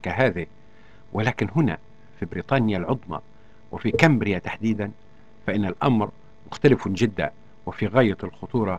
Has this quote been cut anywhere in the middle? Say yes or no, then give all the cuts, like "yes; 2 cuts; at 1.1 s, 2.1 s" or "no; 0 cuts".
no; 0 cuts